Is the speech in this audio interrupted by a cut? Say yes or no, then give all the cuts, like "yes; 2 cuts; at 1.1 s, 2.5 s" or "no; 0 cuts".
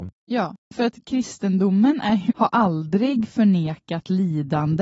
yes; 1 cut; at 2.3 s